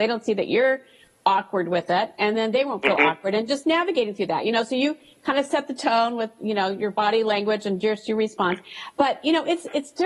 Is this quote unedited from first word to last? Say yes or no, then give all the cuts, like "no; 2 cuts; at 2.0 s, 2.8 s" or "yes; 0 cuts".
yes; 0 cuts